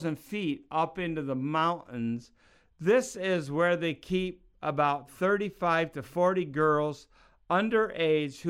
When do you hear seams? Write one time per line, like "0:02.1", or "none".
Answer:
none